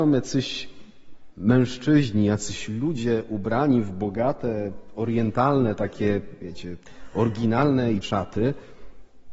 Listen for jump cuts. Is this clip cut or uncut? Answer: cut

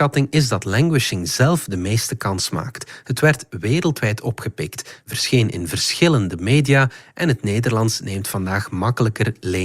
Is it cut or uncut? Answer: uncut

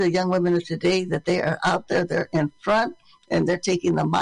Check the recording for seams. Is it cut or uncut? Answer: uncut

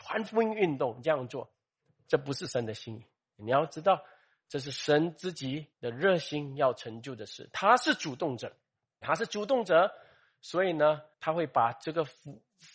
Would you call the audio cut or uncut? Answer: cut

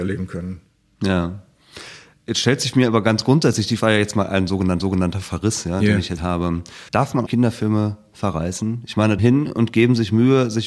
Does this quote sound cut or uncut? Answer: cut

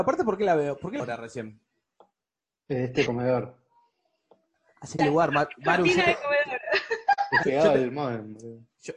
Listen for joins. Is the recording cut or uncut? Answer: cut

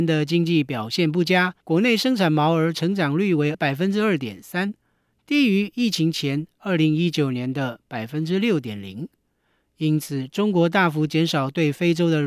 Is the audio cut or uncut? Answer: cut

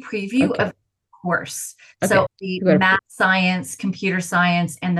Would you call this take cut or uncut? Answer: cut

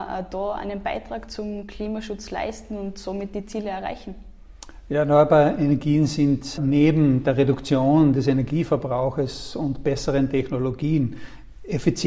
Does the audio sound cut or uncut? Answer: cut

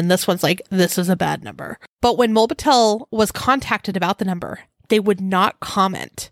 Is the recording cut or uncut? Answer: uncut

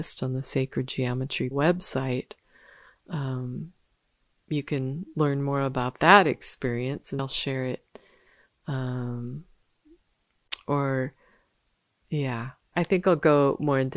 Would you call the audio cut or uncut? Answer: cut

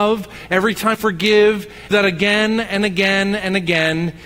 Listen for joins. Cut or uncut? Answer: cut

